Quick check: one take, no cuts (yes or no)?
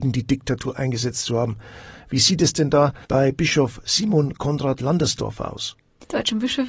no